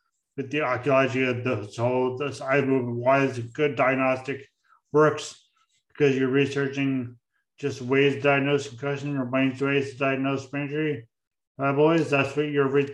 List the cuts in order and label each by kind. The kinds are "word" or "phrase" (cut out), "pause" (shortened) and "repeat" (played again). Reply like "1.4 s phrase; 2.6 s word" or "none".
none